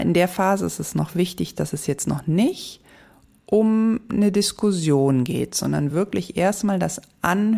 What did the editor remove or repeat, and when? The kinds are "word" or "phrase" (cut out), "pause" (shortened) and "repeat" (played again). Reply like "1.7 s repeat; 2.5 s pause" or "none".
none